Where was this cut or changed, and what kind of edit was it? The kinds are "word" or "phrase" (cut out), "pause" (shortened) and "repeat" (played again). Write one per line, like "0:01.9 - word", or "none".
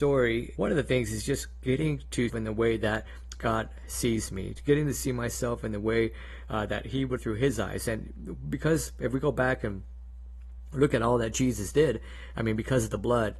0:02.3 - phrase
0:07.2 - phrase